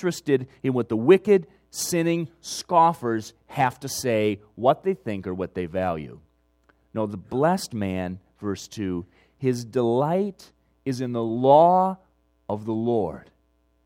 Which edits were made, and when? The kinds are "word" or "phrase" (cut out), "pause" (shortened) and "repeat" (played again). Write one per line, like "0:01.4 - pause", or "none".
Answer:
none